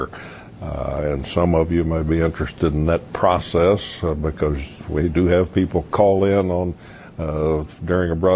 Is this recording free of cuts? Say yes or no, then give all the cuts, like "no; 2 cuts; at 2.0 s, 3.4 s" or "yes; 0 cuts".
yes; 0 cuts